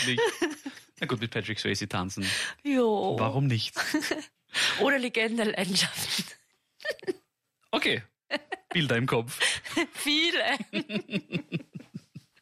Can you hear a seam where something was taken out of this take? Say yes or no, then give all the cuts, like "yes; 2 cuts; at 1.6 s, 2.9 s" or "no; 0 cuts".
no; 0 cuts